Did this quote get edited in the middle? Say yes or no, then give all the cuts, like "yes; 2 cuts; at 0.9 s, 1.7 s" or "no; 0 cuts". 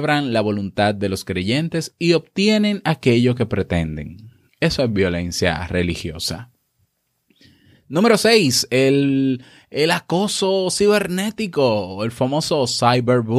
no; 0 cuts